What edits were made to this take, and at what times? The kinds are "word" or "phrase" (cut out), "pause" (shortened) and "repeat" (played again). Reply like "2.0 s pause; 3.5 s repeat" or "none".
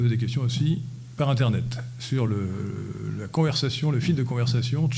none